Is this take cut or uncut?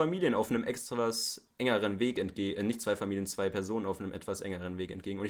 uncut